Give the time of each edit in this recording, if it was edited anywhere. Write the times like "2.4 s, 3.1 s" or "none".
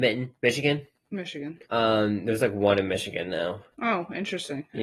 1.6 s